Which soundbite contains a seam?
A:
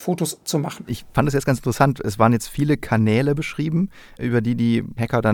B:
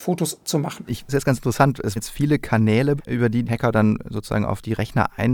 B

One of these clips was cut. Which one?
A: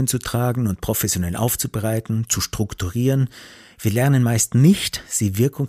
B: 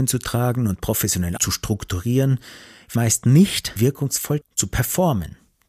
B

